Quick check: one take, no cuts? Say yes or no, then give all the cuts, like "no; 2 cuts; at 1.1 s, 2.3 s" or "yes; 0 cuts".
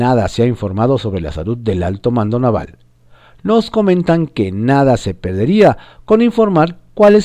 yes; 0 cuts